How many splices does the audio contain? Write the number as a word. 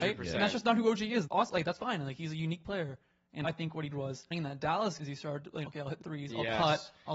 eight